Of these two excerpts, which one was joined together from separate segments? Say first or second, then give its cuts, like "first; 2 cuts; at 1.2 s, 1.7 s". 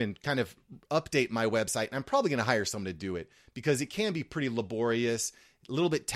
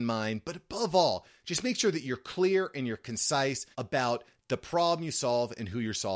second; 1 cut; at 3.7 s